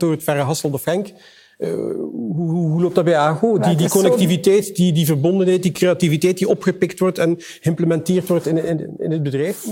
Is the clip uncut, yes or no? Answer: yes